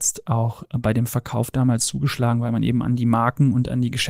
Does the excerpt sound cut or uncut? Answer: uncut